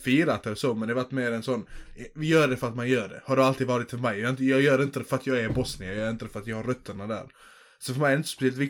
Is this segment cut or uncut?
uncut